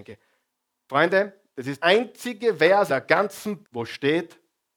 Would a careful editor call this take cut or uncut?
cut